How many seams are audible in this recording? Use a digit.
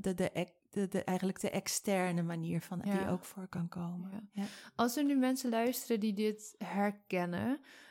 1